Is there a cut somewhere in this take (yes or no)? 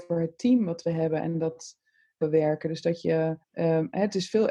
yes